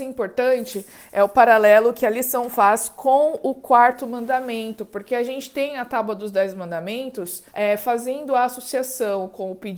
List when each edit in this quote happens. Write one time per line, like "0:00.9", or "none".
0:07.5